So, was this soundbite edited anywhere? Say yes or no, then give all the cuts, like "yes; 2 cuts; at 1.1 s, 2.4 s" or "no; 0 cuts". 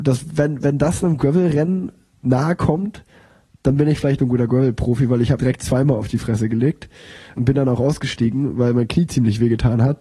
yes; 3 cuts; at 4.2 s, 5.4 s, 7.3 s